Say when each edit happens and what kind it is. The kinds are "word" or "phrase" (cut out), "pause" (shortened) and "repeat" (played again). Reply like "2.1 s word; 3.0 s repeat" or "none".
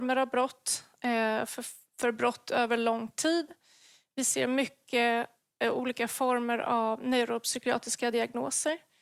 none